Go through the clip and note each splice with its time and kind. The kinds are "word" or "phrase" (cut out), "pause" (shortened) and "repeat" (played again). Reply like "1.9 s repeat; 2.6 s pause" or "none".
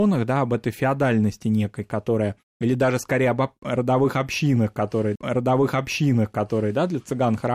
5.2 s repeat